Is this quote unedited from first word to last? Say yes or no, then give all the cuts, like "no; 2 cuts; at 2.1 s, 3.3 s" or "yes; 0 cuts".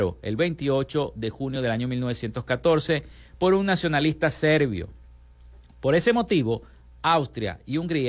yes; 0 cuts